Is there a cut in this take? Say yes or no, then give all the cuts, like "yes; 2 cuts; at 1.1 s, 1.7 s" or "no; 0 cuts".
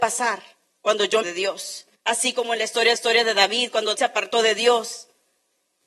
yes; 4 cuts; at 1.2 s, 1.9 s, 2.9 s, 3.9 s